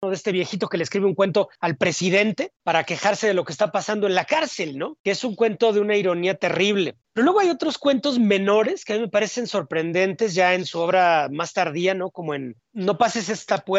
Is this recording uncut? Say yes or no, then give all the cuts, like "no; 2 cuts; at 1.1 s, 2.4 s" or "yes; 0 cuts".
no; 1 cut; at 7.0 s